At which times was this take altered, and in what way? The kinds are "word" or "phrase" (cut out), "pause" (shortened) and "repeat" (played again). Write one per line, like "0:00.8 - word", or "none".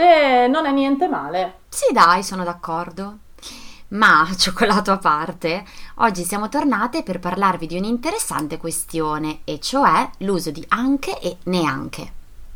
0:01.6 - pause